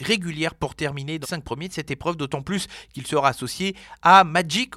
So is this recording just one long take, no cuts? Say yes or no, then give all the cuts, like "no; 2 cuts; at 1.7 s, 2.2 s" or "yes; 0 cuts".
no; 1 cut; at 1.2 s